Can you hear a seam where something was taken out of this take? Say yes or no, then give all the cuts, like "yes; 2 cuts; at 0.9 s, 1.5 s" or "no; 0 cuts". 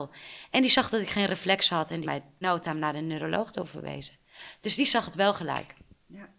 yes; 2 cuts; at 2.0 s, 2.4 s